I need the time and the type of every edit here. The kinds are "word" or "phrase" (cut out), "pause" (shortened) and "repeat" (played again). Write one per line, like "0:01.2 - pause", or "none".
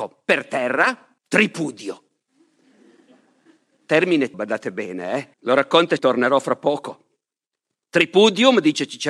0:01.2 - pause
0:04.3 - word
0:05.3 - pause
0:06.0 - phrase